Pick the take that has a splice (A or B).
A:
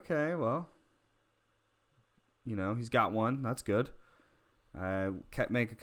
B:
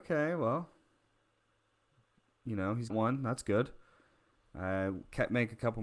B